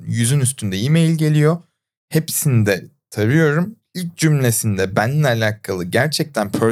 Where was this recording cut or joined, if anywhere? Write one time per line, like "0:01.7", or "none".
none

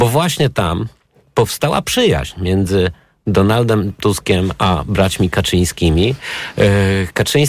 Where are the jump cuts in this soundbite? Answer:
none

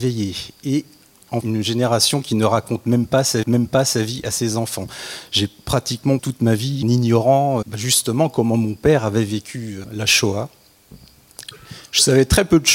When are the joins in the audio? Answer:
0:01.4
0:03.4
0:06.2
0:06.8
0:07.6
0:09.8

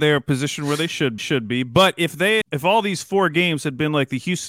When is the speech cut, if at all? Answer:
0:01.2
0:02.4

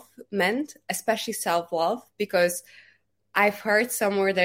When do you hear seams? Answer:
none

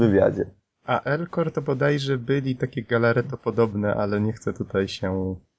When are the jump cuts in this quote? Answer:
0:01.0
0:02.6

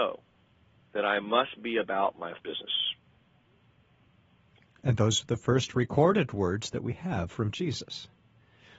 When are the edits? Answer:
0:02.4

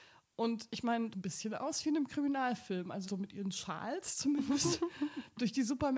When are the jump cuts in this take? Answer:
0:01.1
0:03.1

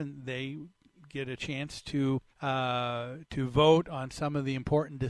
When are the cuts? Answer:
0:02.3

